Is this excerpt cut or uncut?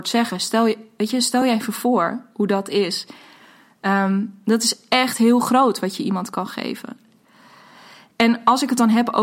uncut